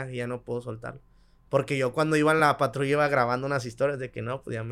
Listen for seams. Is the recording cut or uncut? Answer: uncut